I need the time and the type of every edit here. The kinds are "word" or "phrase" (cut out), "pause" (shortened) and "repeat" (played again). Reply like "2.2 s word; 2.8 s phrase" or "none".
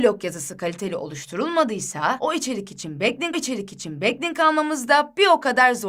3.3 s repeat